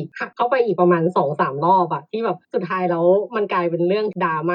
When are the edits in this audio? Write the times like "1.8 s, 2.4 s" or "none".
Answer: 2.4 s